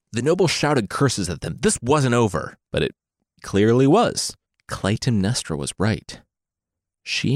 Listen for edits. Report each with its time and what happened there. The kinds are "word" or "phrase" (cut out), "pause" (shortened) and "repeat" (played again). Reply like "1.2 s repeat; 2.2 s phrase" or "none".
2.6 s pause; 3.4 s word; 4.5 s pause